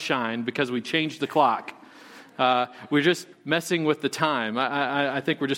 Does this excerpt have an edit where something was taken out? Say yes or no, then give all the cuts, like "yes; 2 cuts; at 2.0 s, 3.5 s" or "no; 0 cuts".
yes; 1 cut; at 3.3 s